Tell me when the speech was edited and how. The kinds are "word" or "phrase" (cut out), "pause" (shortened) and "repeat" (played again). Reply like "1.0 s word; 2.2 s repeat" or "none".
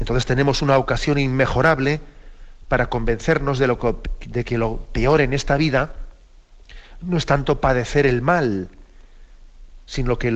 none